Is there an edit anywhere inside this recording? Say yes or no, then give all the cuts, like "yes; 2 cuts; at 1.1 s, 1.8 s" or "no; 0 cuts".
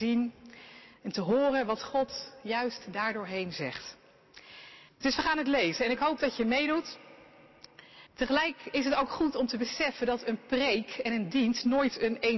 yes; 2 cuts; at 4.9 s, 8.1 s